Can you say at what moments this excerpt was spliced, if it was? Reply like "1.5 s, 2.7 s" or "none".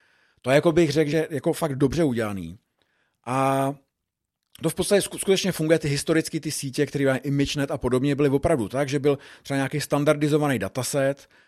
1.1 s